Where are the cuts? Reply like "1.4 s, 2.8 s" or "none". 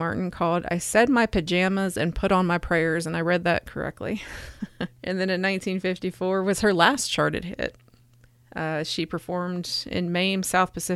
none

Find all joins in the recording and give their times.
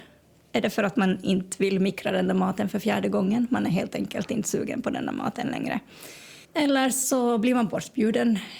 6.4 s

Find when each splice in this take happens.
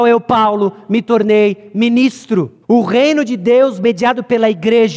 2.6 s

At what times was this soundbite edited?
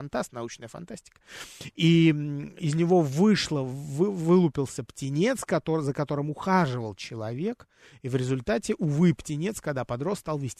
none

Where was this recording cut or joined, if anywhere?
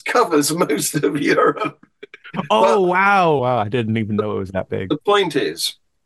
3.4 s

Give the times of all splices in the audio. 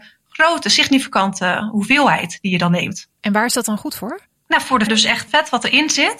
3.1 s, 4.9 s, 5.3 s

